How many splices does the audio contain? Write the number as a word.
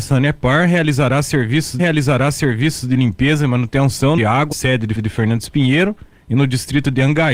four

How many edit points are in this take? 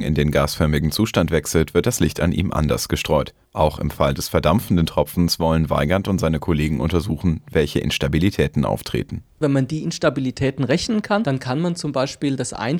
one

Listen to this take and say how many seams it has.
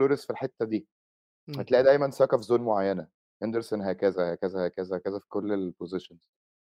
zero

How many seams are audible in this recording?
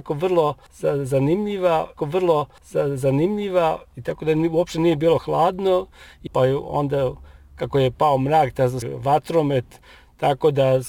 three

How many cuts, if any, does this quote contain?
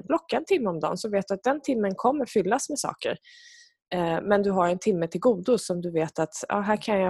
zero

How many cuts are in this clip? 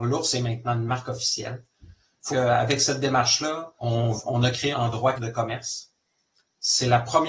five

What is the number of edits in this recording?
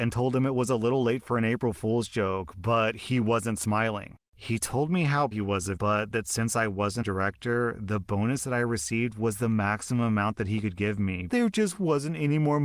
four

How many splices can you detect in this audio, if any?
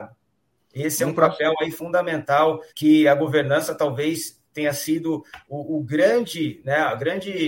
one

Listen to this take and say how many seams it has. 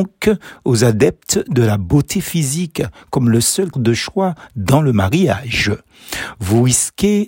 one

